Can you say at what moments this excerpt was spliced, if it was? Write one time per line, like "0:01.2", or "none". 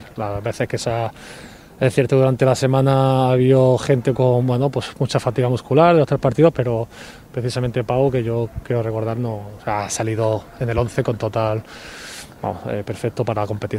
none